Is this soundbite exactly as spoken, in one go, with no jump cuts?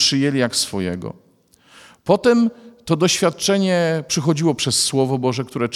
yes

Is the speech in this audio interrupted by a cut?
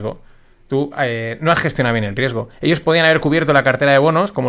no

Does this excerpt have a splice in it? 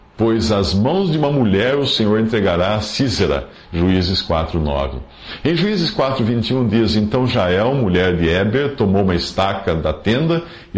no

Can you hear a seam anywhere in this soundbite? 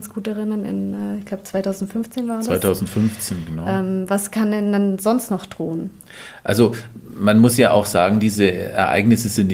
no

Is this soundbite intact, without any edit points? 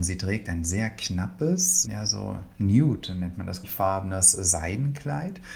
no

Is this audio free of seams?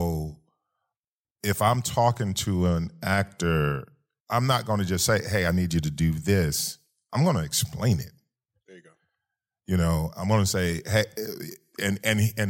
yes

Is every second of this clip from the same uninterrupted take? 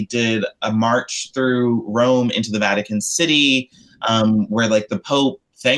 yes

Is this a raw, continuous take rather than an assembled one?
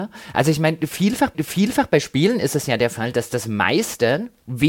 no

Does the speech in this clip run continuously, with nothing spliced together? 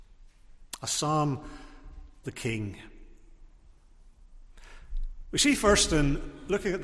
no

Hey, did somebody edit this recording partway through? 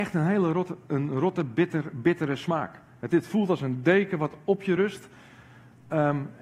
no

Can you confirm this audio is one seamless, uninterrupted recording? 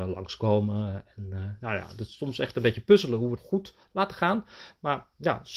no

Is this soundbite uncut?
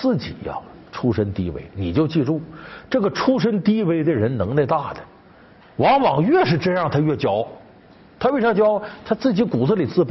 yes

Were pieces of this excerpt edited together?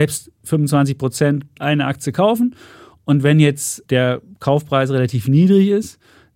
yes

